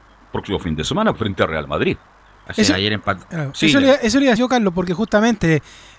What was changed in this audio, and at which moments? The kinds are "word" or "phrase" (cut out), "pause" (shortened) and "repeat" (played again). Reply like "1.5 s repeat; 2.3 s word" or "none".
1.1 s word; 4.4 s word